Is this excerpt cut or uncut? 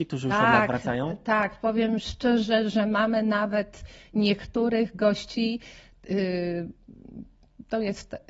uncut